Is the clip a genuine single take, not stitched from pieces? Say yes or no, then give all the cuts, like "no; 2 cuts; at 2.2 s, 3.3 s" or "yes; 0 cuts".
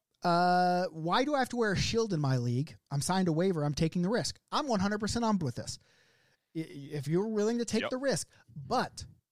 no; 1 cut; at 5.4 s